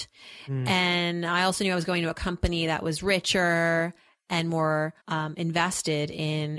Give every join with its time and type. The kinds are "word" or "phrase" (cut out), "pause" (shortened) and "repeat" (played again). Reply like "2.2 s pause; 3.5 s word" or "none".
5.0 s pause